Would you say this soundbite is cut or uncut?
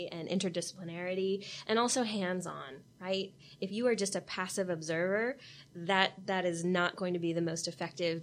uncut